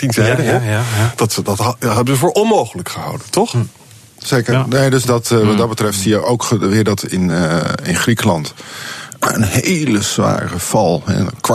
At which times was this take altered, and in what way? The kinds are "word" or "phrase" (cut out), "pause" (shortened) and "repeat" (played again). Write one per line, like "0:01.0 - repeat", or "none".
none